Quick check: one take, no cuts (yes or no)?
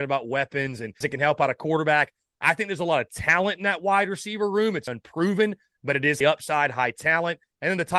no